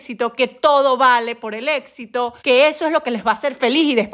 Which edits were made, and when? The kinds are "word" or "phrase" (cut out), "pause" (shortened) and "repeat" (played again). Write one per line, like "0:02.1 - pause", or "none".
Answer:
0:02.4 - pause